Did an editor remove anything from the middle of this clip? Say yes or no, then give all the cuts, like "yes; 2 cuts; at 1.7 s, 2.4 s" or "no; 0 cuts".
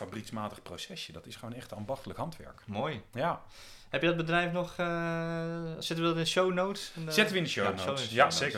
no; 0 cuts